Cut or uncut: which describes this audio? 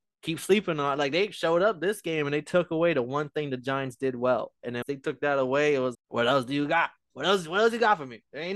cut